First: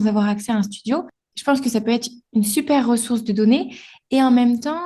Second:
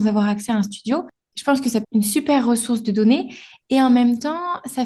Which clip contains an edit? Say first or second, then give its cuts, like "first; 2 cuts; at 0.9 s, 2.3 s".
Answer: second; 1 cut; at 1.8 s